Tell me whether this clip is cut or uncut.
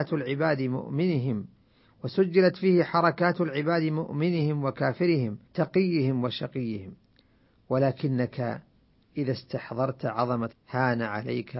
cut